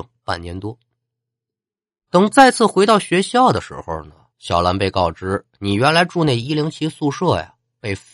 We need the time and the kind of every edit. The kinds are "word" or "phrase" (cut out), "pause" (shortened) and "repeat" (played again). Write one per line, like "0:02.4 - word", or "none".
0:04.3 - pause

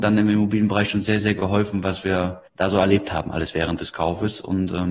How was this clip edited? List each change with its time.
0:02.5 - pause

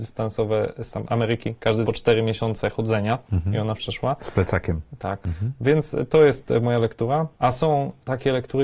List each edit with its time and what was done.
0:01.9 - phrase
0:03.8 - word

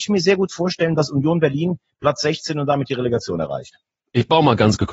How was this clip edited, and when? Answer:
none

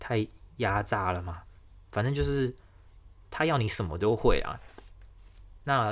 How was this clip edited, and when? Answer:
none

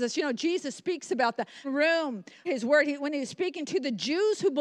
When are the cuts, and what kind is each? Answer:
0:01.6 - word
0:02.5 - word

